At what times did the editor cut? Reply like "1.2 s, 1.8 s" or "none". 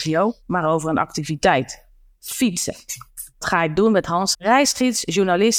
3.4 s, 4.3 s